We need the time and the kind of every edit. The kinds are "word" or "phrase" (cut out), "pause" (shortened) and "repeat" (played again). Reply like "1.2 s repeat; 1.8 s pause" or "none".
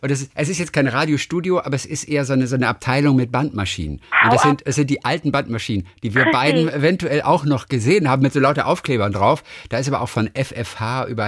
none